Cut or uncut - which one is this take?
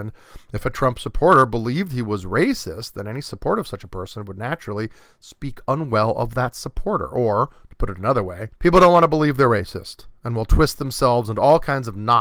cut